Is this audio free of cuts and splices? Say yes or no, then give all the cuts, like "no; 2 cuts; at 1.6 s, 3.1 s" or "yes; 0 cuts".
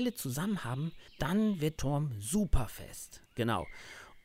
no; 3 cuts; at 1.1 s, 1.8 s, 3.3 s